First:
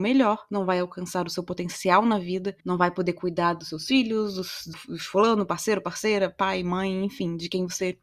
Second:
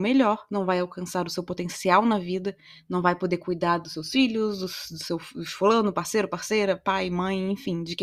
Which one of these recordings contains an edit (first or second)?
first